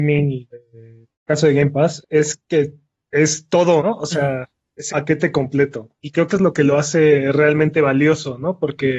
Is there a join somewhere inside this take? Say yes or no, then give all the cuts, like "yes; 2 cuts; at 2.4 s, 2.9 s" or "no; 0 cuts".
yes; 7 cuts; at 1.1 s, 2.0 s, 2.4 s, 3.8 s, 4.9 s, 6.0 s, 6.3 s